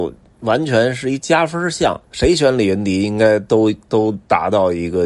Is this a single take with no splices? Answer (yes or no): no